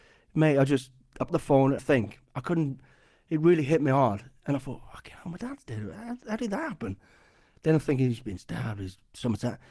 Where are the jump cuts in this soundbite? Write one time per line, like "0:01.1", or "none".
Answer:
0:01.3
0:01.8